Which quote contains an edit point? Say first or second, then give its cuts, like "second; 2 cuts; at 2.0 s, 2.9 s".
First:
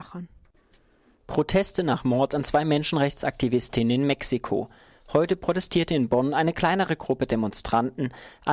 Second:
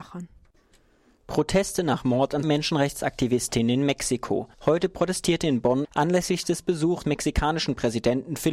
second; 4 cuts; at 2.4 s, 4.5 s, 5.8 s, 7.0 s